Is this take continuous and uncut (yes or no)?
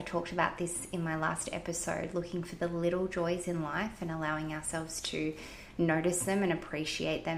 yes